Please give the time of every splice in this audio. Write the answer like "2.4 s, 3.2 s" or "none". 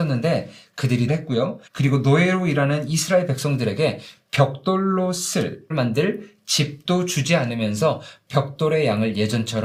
1.1 s, 1.7 s, 5.7 s